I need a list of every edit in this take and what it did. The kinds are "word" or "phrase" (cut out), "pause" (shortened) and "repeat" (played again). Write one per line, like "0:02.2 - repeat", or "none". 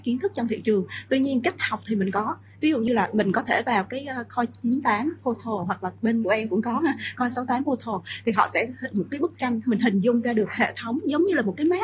0:06.2 - word
0:08.9 - phrase